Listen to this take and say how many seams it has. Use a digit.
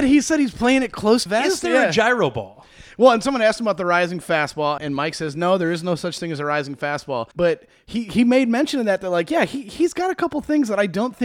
3